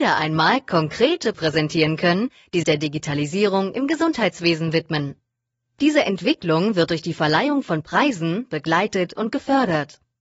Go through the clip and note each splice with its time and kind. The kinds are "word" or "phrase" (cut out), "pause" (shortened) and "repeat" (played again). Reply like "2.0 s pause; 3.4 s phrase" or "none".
1.3 s word; 2.6 s word